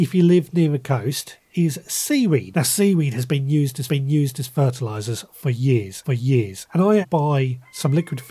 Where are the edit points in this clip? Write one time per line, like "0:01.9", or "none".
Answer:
0:03.9
0:06.0
0:07.0

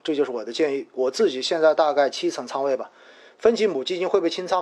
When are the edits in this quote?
none

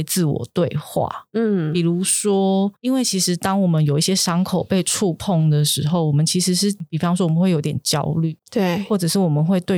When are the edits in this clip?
0:08.4

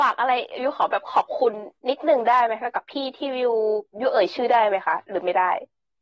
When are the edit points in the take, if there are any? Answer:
0:01.8

